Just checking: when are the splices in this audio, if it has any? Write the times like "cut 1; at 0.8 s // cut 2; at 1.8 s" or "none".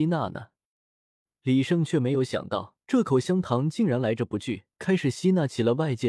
cut 1; at 2.8 s // cut 2; at 4.7 s

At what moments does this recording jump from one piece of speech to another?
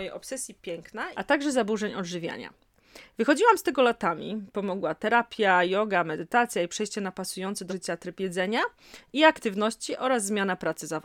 cut 1; at 1.1 s // cut 2; at 7.7 s

